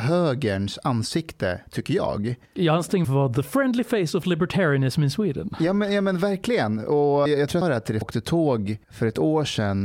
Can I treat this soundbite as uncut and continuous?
no; 6 cuts; at 2.4 s, 3.0 s, 7.3 s, 7.6 s, 8.0 s, 8.8 s

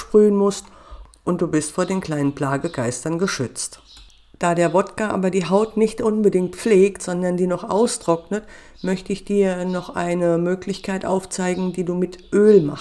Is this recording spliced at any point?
no; 0 cuts

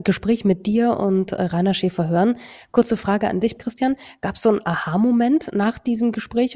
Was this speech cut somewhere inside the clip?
yes; 1 cut; at 3.6 s

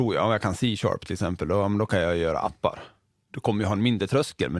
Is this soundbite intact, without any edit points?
yes; 0 cuts

